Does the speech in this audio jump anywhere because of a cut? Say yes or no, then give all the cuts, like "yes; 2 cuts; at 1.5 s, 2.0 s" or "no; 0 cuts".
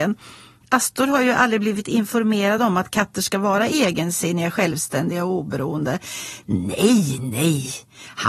no; 0 cuts